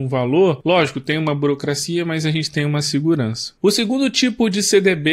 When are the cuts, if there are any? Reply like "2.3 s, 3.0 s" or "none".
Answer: none